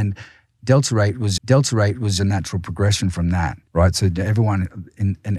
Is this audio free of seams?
no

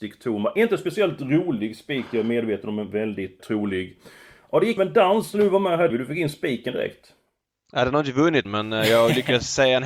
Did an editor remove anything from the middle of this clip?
yes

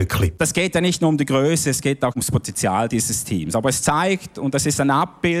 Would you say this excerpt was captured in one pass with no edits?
yes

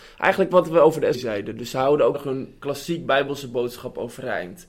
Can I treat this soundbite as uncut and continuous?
no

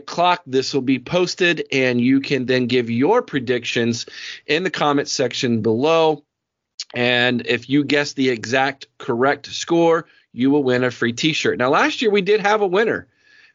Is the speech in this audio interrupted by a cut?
no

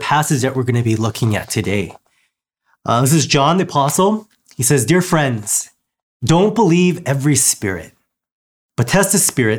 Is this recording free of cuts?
yes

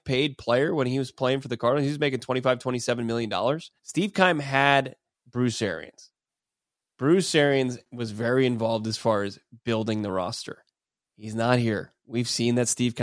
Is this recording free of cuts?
no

